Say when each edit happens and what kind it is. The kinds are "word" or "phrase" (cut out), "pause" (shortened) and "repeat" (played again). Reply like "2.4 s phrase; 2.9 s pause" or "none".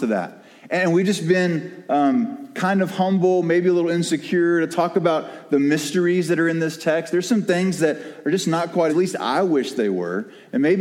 8.9 s phrase